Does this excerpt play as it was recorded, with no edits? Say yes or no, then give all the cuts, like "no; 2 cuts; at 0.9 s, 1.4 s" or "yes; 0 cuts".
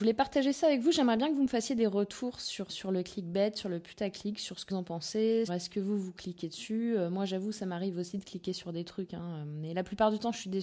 no; 3 cuts; at 2.7 s, 4.7 s, 5.5 s